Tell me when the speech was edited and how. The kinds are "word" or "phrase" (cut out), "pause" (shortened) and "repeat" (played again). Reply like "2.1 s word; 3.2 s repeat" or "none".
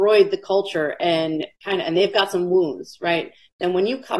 none